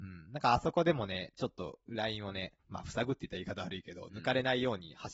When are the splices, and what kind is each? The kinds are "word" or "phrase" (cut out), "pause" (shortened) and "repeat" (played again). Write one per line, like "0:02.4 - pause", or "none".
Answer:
0:02.6 - pause